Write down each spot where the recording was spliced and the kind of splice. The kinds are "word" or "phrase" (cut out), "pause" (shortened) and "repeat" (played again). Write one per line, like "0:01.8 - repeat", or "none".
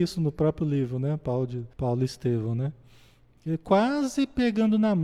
0:01.7 - pause